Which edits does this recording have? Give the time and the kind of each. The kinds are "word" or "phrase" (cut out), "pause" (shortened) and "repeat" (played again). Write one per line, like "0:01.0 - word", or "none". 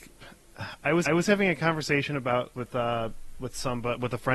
0:01.1 - repeat
0:02.5 - word